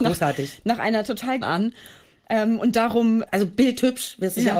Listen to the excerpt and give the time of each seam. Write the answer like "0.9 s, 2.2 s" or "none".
1.4 s, 3.2 s